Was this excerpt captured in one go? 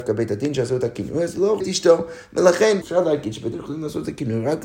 no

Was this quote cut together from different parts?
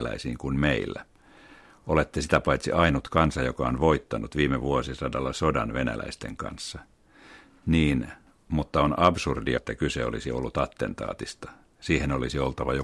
yes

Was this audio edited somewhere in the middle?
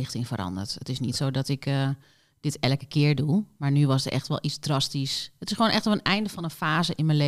no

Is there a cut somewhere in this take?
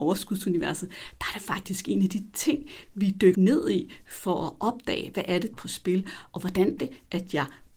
yes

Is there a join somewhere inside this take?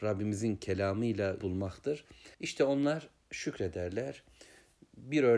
yes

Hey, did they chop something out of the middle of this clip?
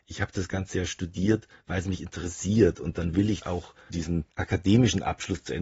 no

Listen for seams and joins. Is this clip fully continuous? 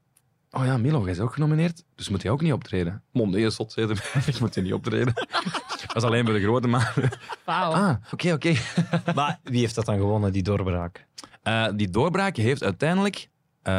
no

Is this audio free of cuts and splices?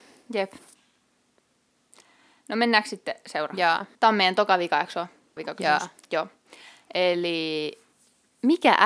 no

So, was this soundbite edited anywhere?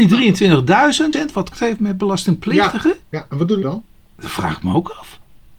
yes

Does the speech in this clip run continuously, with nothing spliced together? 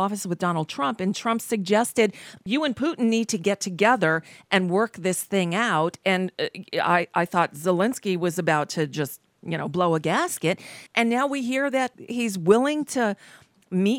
no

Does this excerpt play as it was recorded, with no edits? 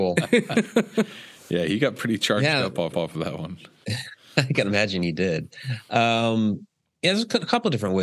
no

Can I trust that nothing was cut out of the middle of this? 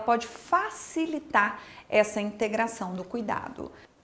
yes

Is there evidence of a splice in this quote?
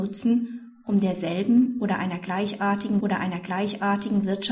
yes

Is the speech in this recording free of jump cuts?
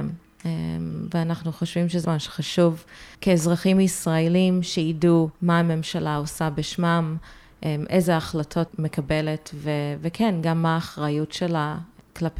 no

